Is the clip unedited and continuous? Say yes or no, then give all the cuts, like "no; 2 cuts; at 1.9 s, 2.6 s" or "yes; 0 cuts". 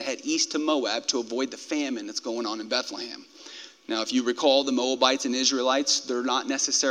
yes; 0 cuts